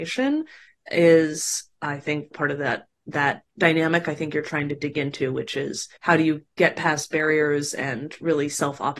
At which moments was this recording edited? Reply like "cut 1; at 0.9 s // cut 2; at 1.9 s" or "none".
cut 1; at 2.3 s // cut 2; at 6.0 s